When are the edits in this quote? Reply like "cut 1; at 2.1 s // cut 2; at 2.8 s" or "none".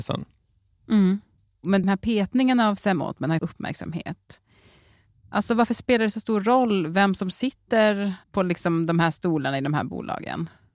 cut 1; at 1.8 s // cut 2; at 3.4 s // cut 3; at 8.2 s